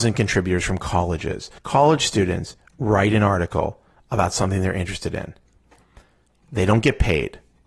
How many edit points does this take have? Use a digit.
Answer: 1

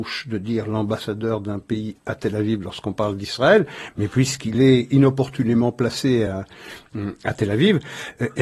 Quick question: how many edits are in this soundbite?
0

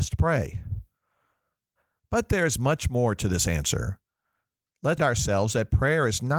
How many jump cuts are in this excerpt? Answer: 1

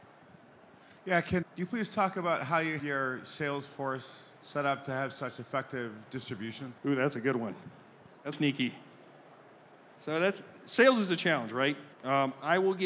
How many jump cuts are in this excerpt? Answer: 6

